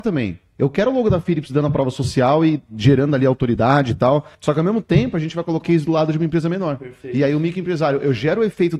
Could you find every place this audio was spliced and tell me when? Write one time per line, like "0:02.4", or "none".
0:04.3
0:05.6

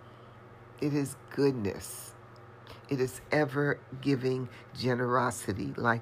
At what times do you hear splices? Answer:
none

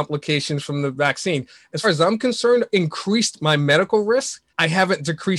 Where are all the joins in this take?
0:01.8
0:02.7
0:04.5

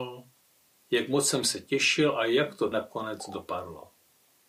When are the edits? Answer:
0:02.7

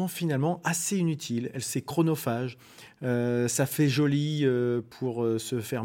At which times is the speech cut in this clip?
none

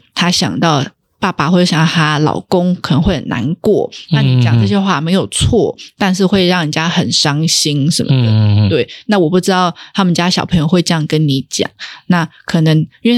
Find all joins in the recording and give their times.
none

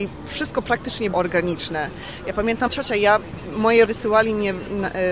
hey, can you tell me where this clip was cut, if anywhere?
0:01.1
0:02.7
0:03.9

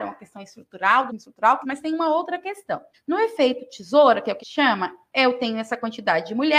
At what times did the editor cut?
0:01.1
0:01.6
0:02.9
0:04.4

